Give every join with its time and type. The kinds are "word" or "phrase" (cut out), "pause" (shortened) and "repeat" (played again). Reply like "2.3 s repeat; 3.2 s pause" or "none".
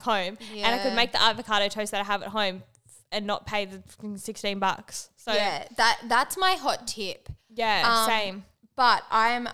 7.4 s pause